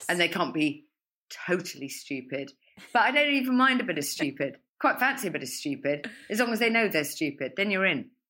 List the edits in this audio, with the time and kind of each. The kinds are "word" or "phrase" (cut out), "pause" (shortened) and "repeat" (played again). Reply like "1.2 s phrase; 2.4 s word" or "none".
4.7 s pause